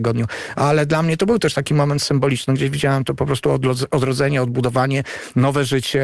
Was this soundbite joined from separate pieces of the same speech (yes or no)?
no